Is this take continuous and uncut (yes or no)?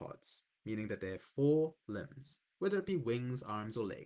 yes